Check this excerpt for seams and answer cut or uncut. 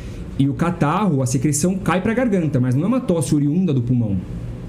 uncut